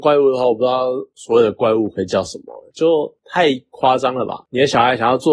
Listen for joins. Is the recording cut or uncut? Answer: cut